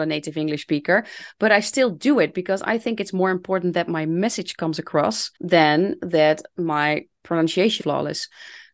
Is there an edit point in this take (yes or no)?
yes